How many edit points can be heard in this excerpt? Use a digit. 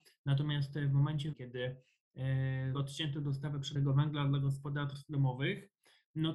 3